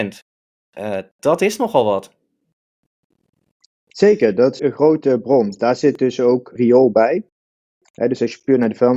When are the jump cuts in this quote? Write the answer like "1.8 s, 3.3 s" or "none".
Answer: 4.6 s, 6.6 s